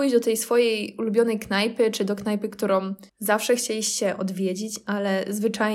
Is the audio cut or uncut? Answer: cut